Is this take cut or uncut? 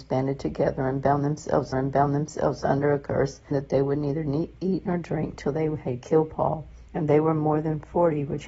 cut